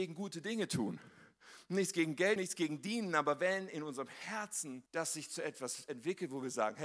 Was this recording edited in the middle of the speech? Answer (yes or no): yes